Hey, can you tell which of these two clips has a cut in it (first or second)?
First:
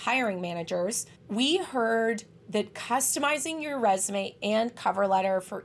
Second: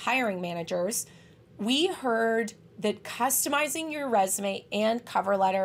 first